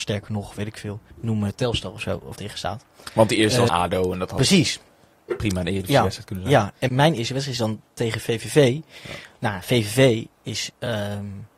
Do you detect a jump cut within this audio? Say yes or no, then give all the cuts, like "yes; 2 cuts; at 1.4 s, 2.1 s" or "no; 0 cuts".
yes; 5 cuts; at 1.1 s, 2.3 s, 3.7 s, 6.9 s, 10.3 s